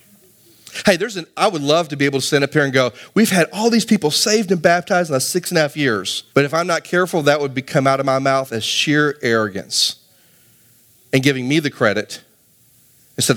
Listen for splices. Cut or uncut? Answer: cut